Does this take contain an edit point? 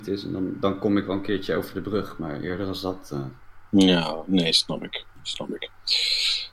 yes; 2 cuts; at 3.7 s, 5.1 s

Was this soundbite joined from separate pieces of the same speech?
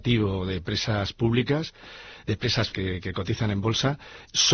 yes; 1 cut; at 2.7 s

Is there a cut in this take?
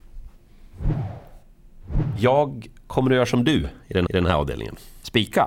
yes; 1 cut; at 4.1 s

